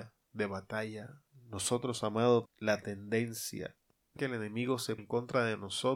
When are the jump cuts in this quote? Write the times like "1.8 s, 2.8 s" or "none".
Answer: 2.5 s, 4.2 s, 5.0 s